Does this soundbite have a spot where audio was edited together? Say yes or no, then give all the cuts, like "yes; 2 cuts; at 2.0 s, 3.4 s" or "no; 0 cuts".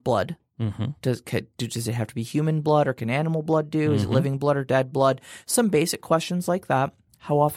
no; 0 cuts